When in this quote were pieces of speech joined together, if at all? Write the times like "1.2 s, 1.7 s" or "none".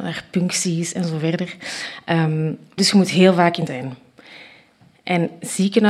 2.8 s, 3.7 s